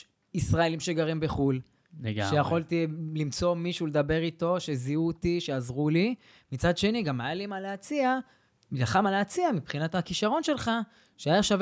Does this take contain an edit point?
no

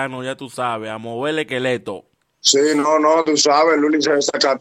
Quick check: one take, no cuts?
no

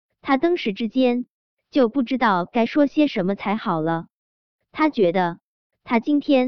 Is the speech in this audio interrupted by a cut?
no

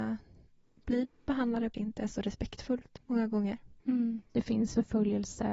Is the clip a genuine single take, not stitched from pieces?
no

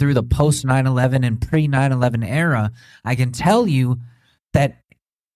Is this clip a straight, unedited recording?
yes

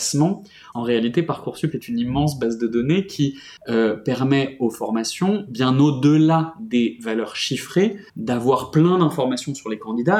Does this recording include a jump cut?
yes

